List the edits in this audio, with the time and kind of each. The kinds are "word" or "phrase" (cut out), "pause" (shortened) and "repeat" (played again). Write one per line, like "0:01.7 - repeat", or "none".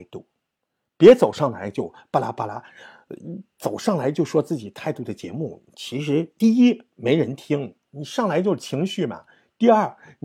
none